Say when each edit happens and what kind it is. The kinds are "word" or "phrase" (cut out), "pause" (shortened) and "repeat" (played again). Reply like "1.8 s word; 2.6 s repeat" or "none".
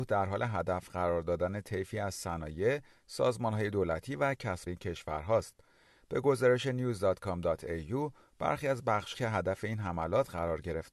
4.7 s phrase; 9.1 s word